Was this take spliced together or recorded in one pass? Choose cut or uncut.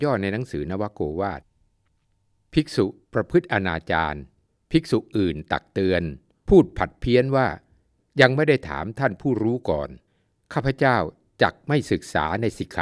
cut